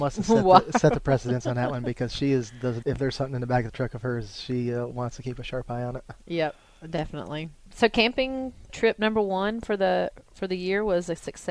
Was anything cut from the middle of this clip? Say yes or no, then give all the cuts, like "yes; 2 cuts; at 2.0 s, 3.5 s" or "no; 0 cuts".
yes; 1 cut; at 2.8 s